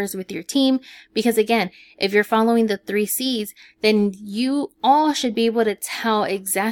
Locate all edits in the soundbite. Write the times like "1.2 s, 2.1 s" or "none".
none